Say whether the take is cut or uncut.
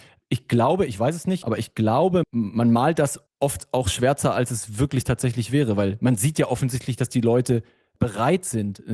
cut